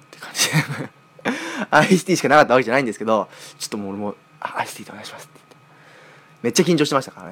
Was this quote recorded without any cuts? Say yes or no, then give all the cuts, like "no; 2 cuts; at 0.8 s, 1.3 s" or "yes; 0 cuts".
yes; 0 cuts